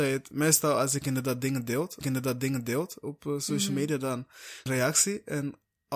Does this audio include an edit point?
yes; 2 cuts; at 2.0 s, 4.7 s

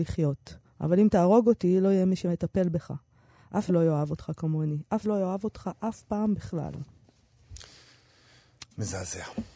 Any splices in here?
yes; 2 cuts; at 3.7 s, 5.0 s

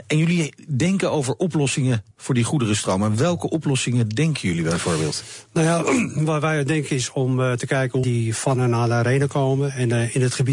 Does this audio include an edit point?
yes; 2 cuts; at 2.1 s, 8.0 s

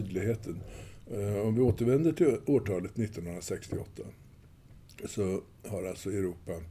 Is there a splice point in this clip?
no; 0 cuts

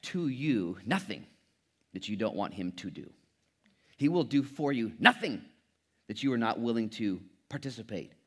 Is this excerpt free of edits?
yes; 0 cuts

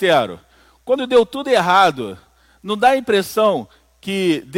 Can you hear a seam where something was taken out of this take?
no; 0 cuts

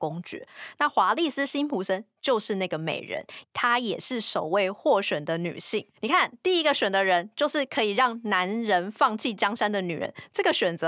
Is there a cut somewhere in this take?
yes; 1 cut; at 5.9 s

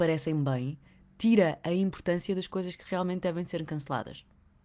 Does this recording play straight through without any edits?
yes; 0 cuts

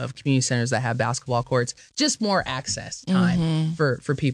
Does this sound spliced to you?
no; 0 cuts

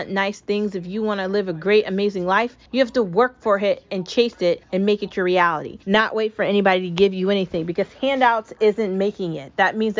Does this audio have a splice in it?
yes; 3 cuts; at 2.7 s, 4.6 s, 5.8 s

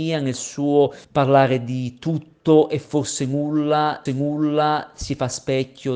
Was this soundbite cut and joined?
yes; 2 cuts; at 1.0 s, 4.1 s

